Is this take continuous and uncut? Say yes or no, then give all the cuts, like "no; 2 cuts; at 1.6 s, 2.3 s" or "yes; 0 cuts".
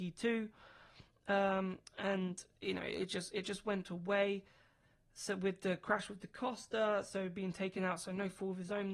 yes; 0 cuts